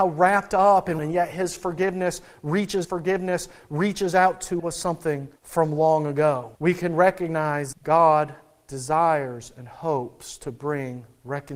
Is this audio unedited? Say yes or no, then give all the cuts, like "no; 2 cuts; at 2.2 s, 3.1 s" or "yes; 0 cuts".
no; 6 cuts; at 1.0 s, 2.8 s, 4.6 s, 5.4 s, 6.6 s, 7.7 s